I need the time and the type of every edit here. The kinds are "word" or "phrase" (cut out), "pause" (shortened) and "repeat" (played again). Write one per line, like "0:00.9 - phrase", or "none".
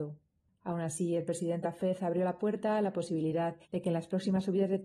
0:01.6 - word
0:03.6 - pause